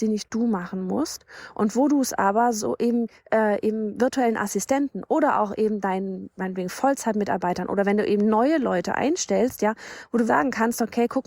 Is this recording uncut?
no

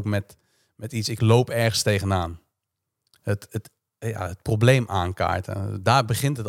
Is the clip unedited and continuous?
yes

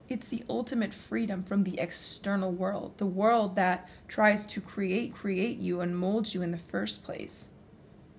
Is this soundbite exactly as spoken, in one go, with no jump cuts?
no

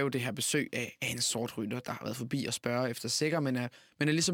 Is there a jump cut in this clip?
no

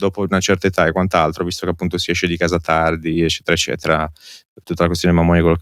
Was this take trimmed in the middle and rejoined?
no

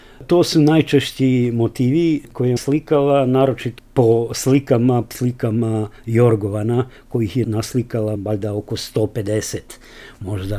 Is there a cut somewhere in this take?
yes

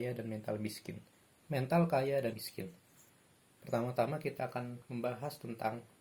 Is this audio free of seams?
no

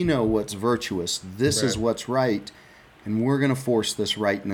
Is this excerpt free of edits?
yes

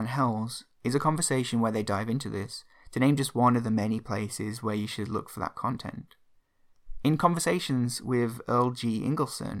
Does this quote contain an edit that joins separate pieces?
no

